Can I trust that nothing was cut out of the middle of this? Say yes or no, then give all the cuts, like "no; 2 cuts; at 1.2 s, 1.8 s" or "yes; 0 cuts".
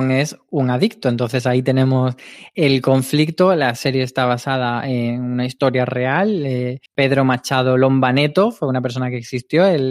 no; 1 cut; at 6.9 s